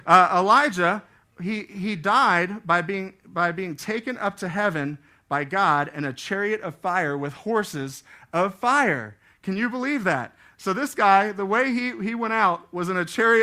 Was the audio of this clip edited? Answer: no; 0 cuts

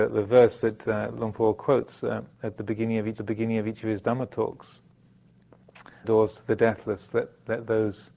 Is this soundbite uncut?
no; 2 cuts; at 3.2 s, 6.0 s

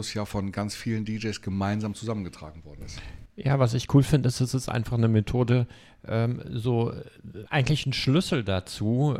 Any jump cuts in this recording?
no; 0 cuts

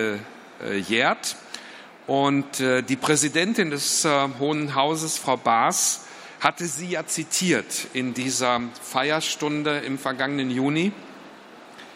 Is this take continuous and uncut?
yes; 0 cuts

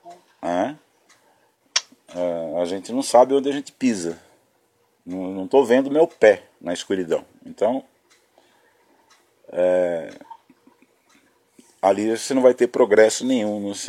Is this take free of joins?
yes; 0 cuts

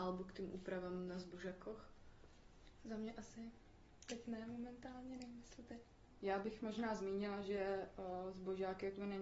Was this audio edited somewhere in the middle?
no; 0 cuts

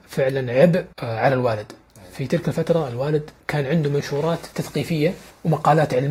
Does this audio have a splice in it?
yes; 3 cuts; at 0.9 s, 3.4 s, 4.5 s

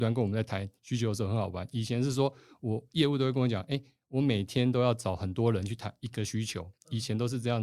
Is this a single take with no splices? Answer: yes; 0 cuts

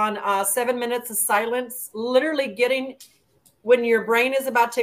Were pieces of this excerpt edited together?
no; 0 cuts

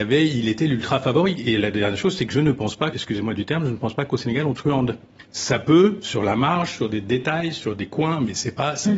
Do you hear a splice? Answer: yes; 2 cuts; at 2.9 s, 5.3 s

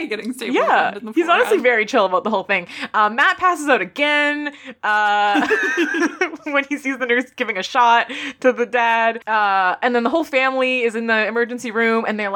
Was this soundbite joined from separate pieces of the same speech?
no; 0 cuts

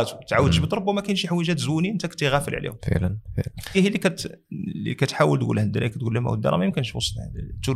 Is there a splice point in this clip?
yes; 1 cut; at 3.7 s

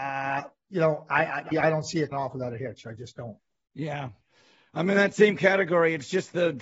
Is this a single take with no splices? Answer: no; 2 cuts; at 1.5 s, 2.1 s

